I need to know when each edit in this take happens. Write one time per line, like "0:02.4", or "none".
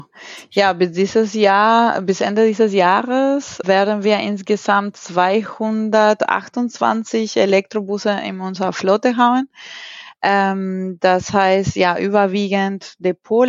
0:03.6